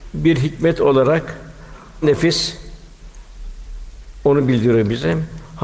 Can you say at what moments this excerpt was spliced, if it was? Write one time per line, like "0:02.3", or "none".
0:02.0

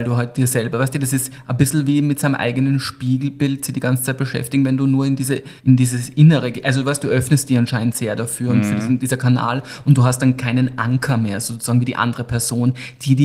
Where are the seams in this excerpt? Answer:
0:05.6

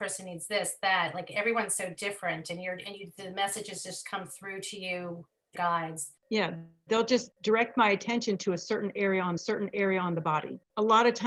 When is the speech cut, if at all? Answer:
0:05.6
0:09.4

